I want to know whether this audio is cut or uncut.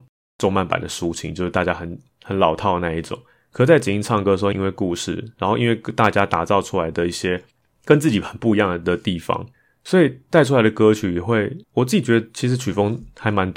cut